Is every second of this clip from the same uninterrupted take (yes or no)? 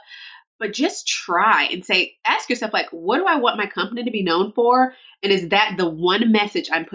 yes